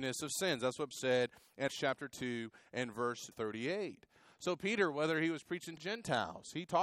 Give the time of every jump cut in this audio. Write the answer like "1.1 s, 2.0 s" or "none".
0.9 s, 1.7 s, 3.3 s, 5.8 s